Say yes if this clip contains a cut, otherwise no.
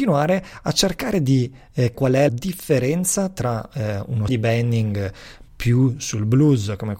yes